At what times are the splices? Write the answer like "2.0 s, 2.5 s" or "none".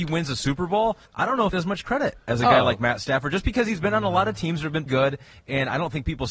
1.1 s, 1.5 s, 4.9 s